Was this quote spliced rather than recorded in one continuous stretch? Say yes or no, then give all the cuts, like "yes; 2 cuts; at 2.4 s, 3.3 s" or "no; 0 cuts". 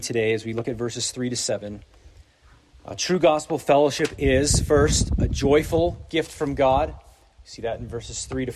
no; 0 cuts